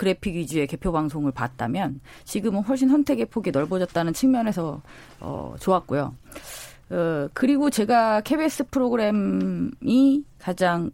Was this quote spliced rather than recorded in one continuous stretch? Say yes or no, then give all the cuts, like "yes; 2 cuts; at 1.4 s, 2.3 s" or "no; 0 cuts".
no; 0 cuts